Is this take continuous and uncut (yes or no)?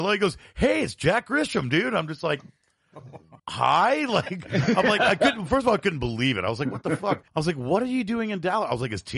no